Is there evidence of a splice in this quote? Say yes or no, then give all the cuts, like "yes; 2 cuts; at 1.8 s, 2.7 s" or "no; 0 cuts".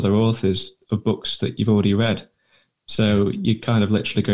no; 0 cuts